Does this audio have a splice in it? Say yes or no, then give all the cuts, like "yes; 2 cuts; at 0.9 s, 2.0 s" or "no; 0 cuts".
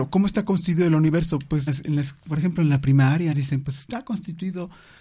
yes; 2 cuts; at 1.7 s, 3.3 s